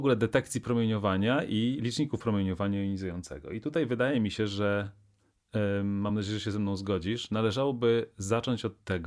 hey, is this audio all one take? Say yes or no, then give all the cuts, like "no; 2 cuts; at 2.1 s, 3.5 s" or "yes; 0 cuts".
yes; 0 cuts